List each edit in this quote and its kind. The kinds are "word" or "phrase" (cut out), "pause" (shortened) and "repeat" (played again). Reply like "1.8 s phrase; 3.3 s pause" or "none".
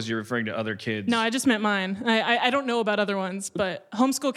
none